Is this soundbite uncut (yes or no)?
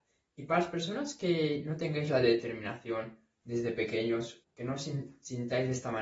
no